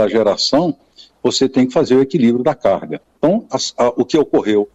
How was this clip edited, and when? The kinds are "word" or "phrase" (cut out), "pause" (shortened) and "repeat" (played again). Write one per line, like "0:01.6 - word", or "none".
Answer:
none